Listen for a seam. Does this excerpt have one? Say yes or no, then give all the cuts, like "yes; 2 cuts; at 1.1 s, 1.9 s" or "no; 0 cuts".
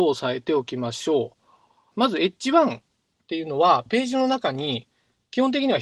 no; 0 cuts